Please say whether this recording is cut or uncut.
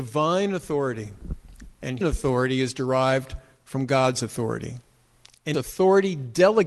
cut